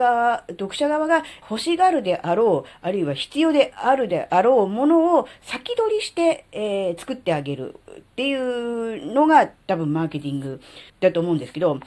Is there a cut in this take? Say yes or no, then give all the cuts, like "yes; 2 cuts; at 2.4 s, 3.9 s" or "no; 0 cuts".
yes; 2 cuts; at 1.4 s, 10.9 s